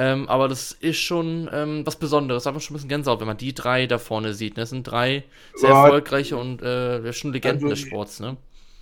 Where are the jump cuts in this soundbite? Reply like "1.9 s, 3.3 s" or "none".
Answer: none